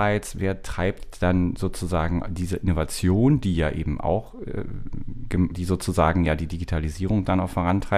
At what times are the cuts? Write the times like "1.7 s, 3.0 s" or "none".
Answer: 5.5 s